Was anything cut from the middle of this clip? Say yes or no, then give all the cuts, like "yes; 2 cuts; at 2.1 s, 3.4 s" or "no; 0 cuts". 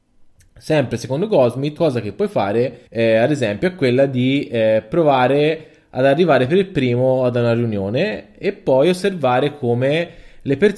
yes; 2 cuts; at 1.8 s, 2.9 s